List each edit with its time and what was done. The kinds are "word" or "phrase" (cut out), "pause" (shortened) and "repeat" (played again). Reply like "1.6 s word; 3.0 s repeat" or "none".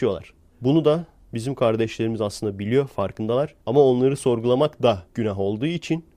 3.6 s pause; 5.1 s pause